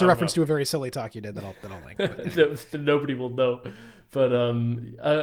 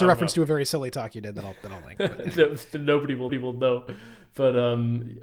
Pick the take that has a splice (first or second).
second